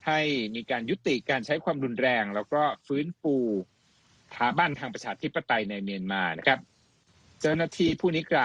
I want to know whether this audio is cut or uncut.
uncut